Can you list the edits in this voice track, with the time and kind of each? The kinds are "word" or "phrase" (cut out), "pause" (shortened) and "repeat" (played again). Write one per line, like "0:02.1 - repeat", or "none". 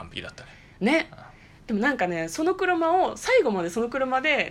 none